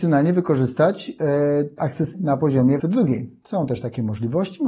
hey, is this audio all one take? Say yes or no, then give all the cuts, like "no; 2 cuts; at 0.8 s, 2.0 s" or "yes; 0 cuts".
no; 3 cuts; at 1.8 s, 2.1 s, 2.8 s